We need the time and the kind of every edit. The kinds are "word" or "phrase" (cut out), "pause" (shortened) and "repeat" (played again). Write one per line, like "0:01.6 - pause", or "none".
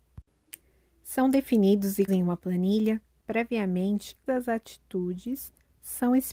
0:02.1 - word
0:04.3 - word